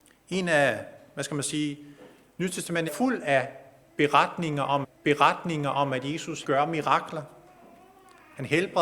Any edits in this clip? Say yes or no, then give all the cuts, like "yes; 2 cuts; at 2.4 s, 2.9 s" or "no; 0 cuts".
yes; 3 cuts; at 2.9 s, 4.8 s, 6.4 s